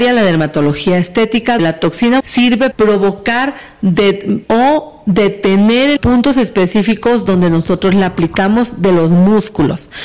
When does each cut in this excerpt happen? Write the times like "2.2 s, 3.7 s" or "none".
1.6 s, 2.2 s, 2.7 s, 4.4 s, 6.0 s